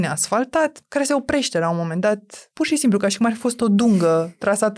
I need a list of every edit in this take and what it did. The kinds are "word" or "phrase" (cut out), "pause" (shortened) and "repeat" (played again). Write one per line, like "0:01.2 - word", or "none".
none